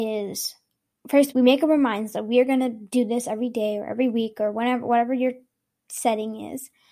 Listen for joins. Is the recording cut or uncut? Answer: cut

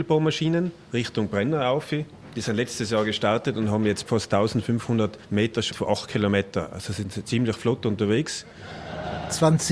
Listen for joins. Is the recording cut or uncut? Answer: cut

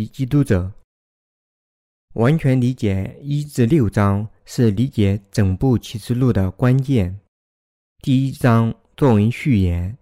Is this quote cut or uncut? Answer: uncut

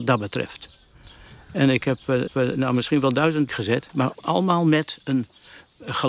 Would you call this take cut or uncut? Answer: cut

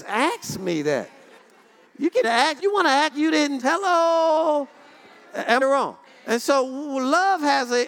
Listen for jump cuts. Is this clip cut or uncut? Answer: cut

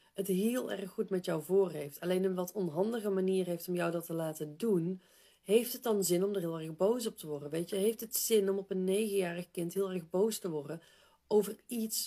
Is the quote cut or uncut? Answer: uncut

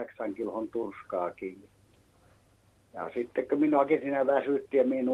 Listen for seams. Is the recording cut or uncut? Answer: uncut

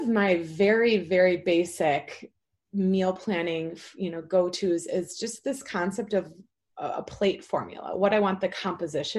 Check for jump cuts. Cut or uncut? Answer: uncut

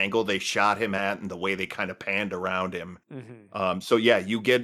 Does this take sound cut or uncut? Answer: cut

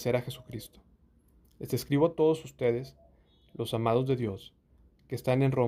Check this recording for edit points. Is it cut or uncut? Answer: uncut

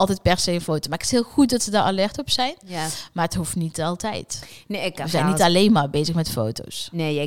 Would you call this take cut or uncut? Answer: uncut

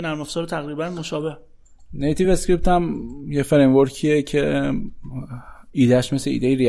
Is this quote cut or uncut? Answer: uncut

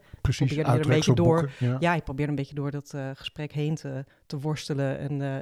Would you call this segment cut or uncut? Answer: cut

